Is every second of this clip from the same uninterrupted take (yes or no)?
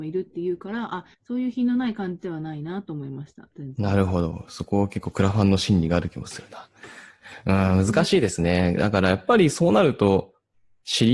no